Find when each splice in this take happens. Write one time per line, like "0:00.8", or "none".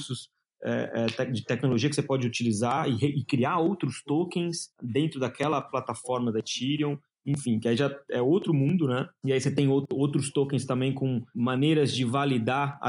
0:04.7